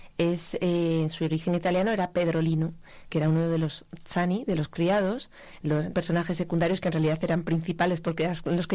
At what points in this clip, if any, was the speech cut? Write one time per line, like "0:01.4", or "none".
0:05.9